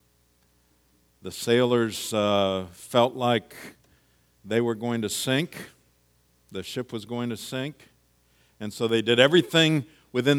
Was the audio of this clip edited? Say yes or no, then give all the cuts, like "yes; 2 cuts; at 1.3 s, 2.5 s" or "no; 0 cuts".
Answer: no; 0 cuts